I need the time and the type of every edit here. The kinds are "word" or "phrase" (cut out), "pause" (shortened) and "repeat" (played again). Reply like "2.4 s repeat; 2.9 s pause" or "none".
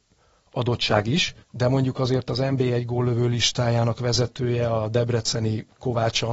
1.4 s pause